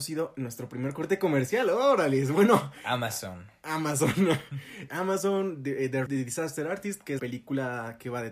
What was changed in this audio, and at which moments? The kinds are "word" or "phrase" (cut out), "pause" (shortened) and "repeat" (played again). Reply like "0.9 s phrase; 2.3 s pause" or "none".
4.9 s word; 6.1 s word; 7.2 s word